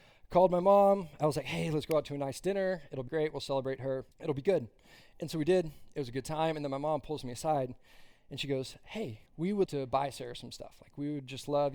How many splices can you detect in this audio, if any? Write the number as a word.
four